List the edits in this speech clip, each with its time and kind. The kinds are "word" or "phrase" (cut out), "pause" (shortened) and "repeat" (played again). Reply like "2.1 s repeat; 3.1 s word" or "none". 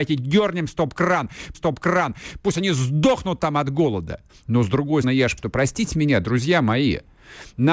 1.5 s repeat; 4.3 s pause; 5.0 s word; 5.4 s word